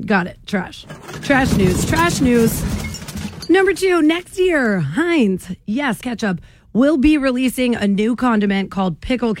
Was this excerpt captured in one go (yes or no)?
no